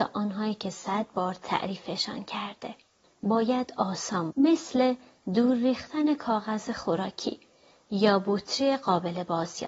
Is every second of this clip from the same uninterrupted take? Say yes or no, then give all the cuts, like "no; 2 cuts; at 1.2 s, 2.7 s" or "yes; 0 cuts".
no; 2 cuts; at 3.0 s, 4.3 s